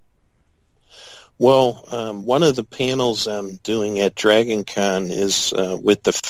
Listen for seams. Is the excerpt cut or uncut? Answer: uncut